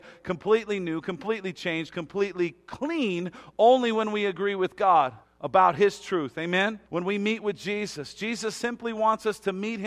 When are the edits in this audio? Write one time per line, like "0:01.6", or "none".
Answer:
0:05.2
0:06.9